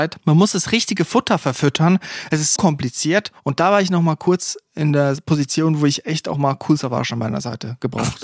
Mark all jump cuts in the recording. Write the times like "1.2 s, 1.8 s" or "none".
2.6 s, 6.3 s